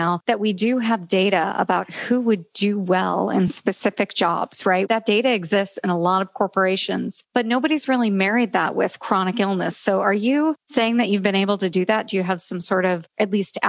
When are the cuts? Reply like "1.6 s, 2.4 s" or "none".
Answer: none